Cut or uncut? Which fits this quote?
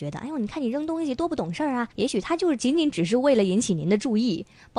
cut